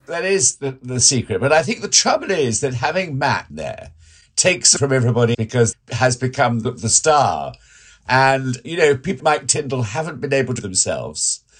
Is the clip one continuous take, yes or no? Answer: no